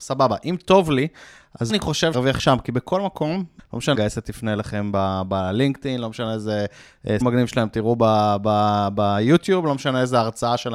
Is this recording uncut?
no; 5 cuts; at 1.7 s, 2.1 s, 3.6 s, 3.9 s, 7.2 s

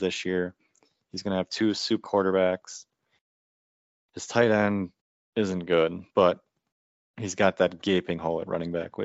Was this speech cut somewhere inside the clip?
yes; 3 cuts; at 2.0 s, 5.0 s, 6.1 s

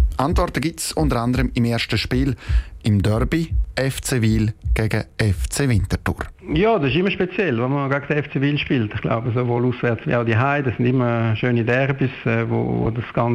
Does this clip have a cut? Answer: no; 0 cuts

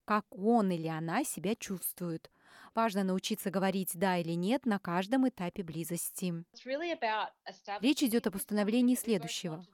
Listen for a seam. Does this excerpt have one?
no; 0 cuts

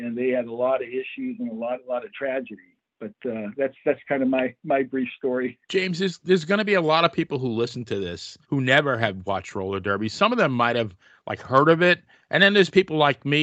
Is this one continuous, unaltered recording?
no; 2 cuts; at 5.6 s, 8.4 s

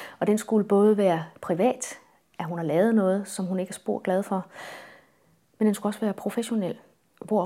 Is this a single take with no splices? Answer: yes; 0 cuts

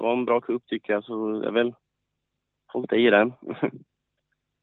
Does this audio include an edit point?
no; 0 cuts

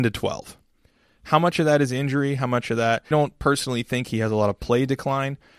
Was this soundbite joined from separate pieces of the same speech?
yes; 1 cut; at 3.1 s

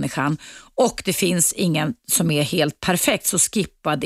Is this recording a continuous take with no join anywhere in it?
yes; 0 cuts

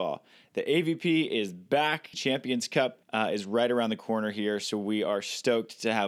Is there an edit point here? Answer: yes; 2 cuts; at 2.1 s, 3.0 s

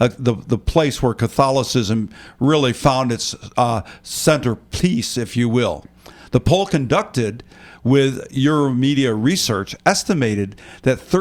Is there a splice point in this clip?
no; 0 cuts

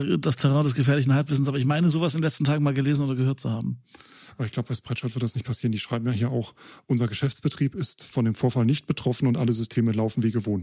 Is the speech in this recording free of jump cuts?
yes; 0 cuts

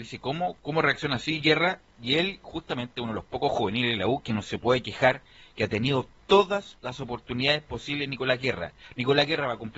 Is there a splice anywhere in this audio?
no; 0 cuts

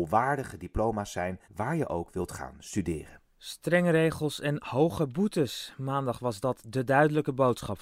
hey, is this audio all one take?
no; 1 cut; at 1.4 s

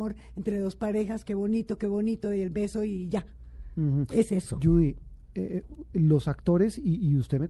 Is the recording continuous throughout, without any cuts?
no; 1 cut; at 5.2 s

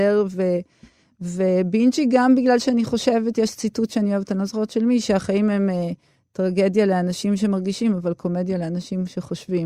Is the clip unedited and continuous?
yes; 0 cuts

